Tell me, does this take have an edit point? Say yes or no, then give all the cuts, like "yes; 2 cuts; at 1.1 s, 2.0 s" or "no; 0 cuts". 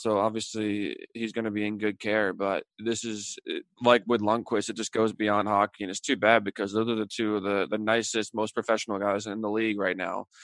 no; 0 cuts